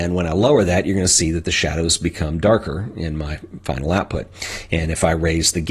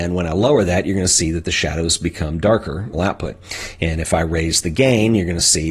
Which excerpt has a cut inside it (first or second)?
second